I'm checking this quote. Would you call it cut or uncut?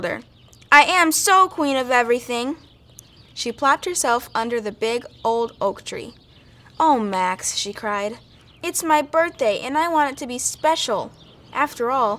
uncut